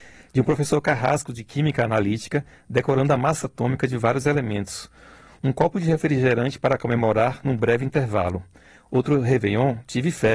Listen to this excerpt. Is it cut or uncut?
uncut